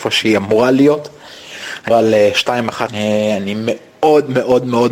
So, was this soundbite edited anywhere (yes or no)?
yes